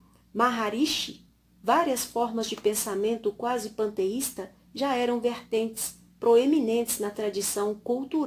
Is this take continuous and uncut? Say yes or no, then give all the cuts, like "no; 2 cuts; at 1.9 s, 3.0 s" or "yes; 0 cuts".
yes; 0 cuts